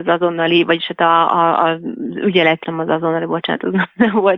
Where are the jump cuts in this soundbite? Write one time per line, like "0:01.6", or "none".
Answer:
0:02.6